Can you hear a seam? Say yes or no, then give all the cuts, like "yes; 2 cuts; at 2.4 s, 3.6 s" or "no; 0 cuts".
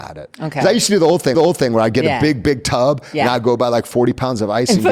yes; 1 cut; at 1.3 s